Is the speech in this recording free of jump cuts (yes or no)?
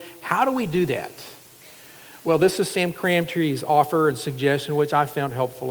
yes